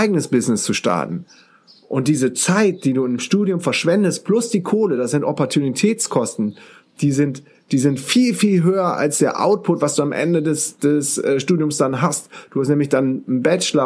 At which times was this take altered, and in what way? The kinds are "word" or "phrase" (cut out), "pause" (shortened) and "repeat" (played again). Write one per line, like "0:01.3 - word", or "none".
none